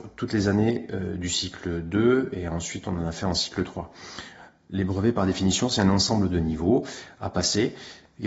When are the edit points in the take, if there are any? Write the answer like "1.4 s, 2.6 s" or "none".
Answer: none